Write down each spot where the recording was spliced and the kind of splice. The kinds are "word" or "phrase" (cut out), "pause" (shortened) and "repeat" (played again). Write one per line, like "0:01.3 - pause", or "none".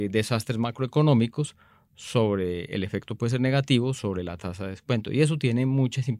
none